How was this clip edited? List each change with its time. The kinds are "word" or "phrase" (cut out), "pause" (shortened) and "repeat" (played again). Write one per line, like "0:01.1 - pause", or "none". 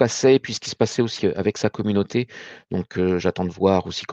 0:01.2 - word